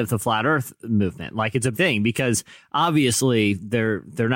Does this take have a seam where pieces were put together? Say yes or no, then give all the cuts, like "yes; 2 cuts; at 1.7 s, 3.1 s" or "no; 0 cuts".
yes; 1 cut; at 1.7 s